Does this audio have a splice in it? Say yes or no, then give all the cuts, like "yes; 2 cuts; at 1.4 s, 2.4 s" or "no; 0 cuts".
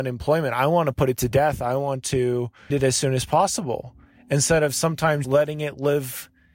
yes; 2 cuts; at 2.7 s, 5.2 s